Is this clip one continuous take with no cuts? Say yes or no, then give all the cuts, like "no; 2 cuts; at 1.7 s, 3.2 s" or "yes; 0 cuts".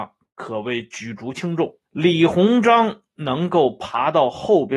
no; 1 cut; at 1.9 s